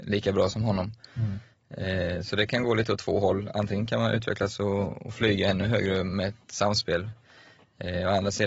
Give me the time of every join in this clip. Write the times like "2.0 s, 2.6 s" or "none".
none